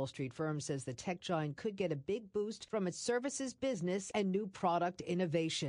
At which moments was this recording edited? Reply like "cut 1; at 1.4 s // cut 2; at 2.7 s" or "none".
none